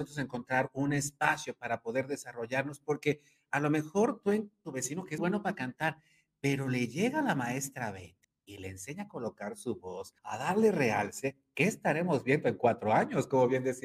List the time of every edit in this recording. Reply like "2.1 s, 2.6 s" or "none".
4.6 s, 5.2 s, 8.2 s, 10.2 s